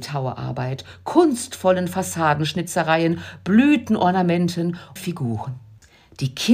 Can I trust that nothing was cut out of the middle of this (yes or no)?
no